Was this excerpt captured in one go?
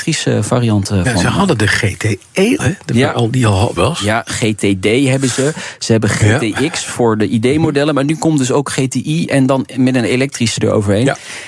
no; 3 cuts; at 2.6 s, 3.8 s, 10.6 s

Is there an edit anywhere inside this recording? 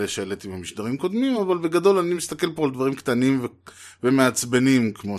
no; 0 cuts

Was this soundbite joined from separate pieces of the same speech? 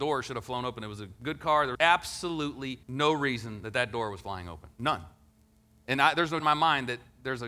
yes; 4 cuts; at 1.8 s, 2.8 s, 5.3 s, 6.4 s

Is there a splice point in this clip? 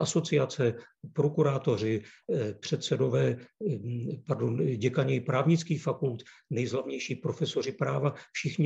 no; 0 cuts

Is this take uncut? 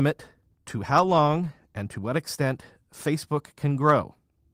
yes; 0 cuts

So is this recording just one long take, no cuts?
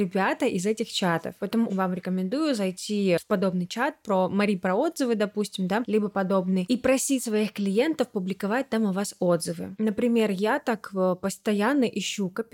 no; 1 cut; at 1.7 s

